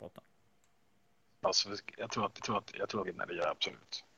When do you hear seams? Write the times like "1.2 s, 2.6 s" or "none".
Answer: 2.4 s, 3.0 s